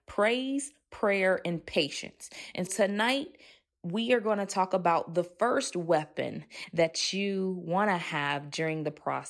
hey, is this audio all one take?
no; 1 cut; at 2.7 s

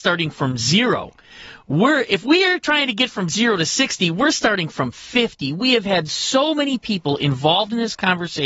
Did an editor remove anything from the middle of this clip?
no; 0 cuts

